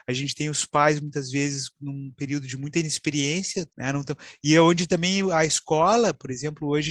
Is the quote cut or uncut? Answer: cut